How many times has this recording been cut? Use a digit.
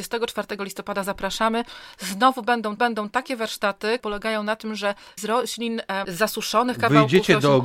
4